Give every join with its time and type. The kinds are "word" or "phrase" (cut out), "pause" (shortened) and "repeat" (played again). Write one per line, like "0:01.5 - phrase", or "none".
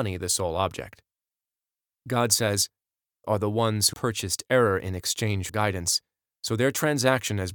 0:03.2 - word
0:03.9 - word
0:05.5 - word